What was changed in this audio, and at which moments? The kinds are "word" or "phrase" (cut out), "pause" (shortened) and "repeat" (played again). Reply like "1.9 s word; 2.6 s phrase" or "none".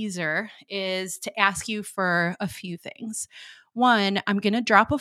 none